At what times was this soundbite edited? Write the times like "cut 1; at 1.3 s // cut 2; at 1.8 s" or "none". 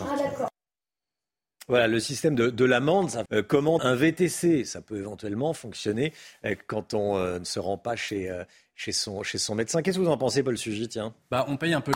cut 1; at 3.3 s // cut 2; at 3.8 s